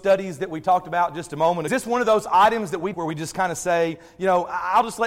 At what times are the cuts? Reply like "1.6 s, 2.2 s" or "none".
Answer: 1.7 s, 2.9 s